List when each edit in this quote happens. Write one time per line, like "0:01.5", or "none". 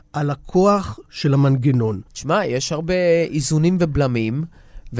0:02.1